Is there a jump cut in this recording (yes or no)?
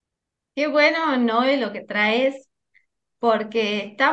no